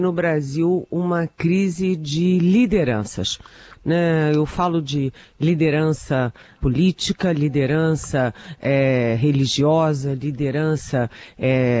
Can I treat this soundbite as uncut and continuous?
no; 1 cut; at 6.6 s

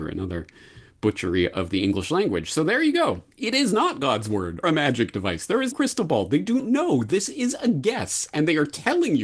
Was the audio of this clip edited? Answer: yes; 4 cuts; at 3.3 s, 4.6 s, 5.7 s, 6.6 s

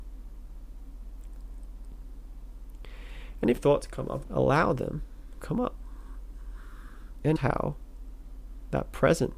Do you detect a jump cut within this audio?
yes; 4 cuts; at 3.6 s, 4.2 s, 5.4 s, 7.4 s

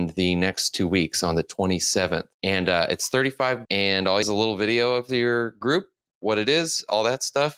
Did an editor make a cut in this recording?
yes; 3 cuts; at 2.3 s, 3.6 s, 4.2 s

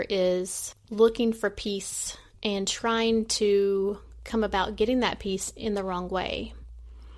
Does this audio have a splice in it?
yes; 1 cut; at 2.3 s

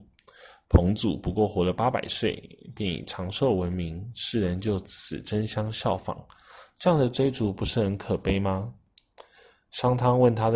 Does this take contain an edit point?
no; 0 cuts

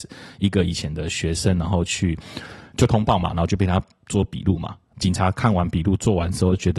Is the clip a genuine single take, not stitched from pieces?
yes; 0 cuts

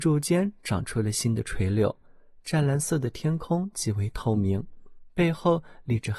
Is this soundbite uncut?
yes; 0 cuts

